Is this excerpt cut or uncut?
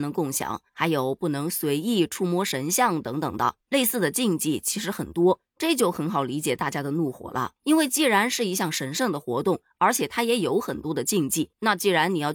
cut